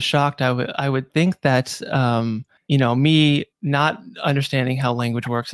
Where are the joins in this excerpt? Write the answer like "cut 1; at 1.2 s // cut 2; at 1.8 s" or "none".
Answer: cut 1; at 2.6 s // cut 2; at 3.5 s